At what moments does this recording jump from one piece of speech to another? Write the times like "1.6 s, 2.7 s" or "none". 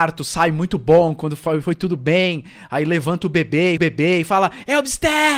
3.8 s